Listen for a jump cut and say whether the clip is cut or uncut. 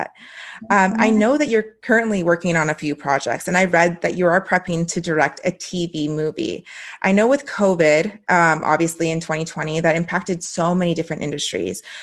uncut